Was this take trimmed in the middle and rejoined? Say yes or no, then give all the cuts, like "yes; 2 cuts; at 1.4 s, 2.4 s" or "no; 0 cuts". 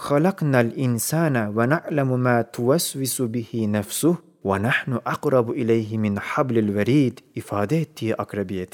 no; 0 cuts